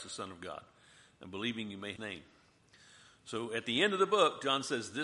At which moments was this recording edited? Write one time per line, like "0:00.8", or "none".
0:02.0